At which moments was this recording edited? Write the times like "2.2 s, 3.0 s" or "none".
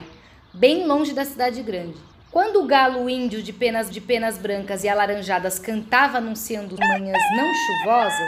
2.1 s, 3.9 s, 6.8 s